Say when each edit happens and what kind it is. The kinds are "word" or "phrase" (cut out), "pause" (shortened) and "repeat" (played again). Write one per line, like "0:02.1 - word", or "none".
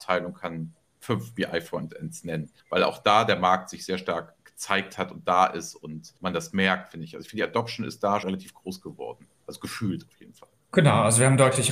0:02.6 - pause
0:06.2 - pause
0:08.2 - word

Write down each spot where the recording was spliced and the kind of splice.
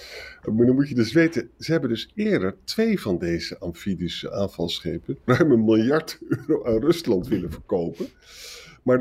0:05.3 - word

